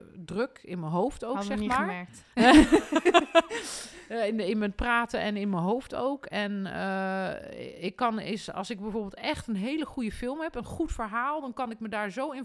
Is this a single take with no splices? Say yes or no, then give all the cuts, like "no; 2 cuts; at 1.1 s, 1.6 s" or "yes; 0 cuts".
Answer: yes; 0 cuts